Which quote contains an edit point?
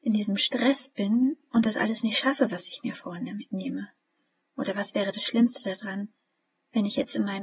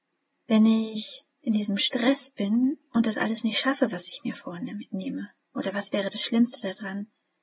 second; 2 cuts; at 1.3 s, 5.4 s

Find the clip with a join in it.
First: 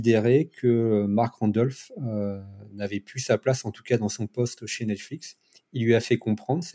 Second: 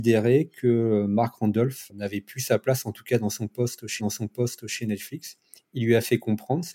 second; 2 cuts; at 1.9 s, 4.0 s

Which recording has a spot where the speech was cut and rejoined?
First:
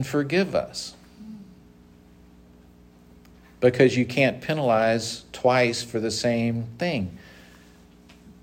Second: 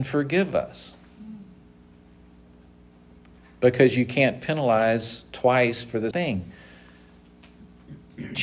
second; 1 cut; at 6.1 s

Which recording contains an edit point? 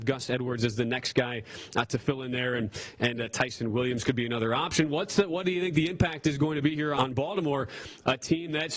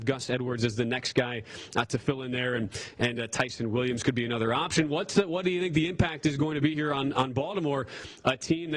first; 1 cut; at 6.9 s

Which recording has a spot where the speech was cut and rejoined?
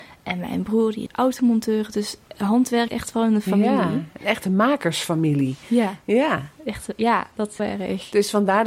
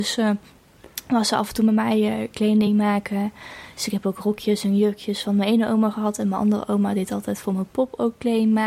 first; 4 cuts; at 1.1 s, 2.3 s, 2.9 s, 7.6 s

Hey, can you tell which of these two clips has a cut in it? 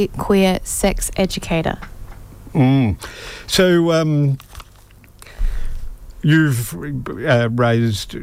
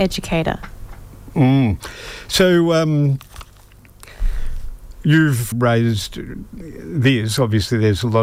second; 1 cut; at 5.5 s

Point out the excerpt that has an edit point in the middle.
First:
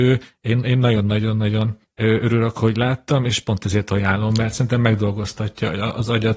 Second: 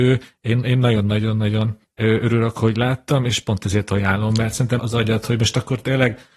second; 1 cut; at 4.8 s

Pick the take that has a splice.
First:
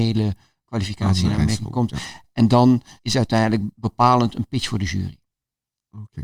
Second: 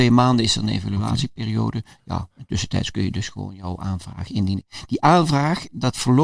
first; 2 cuts; at 3.0 s, 3.7 s

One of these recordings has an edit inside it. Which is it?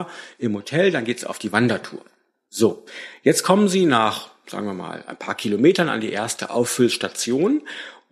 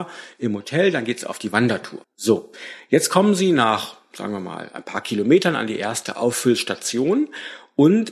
second; 1 cut; at 2.0 s

